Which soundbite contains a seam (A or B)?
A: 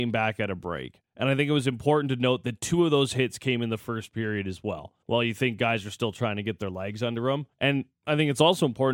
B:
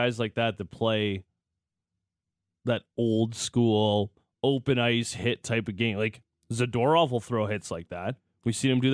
A